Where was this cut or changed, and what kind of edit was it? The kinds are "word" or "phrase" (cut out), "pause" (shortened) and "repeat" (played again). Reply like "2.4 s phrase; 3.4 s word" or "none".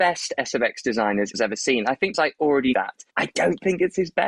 1.3 s phrase; 2.1 s word; 2.7 s word; 3.1 s pause